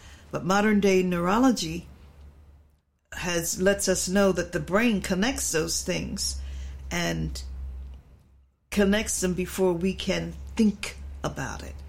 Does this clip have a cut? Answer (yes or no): no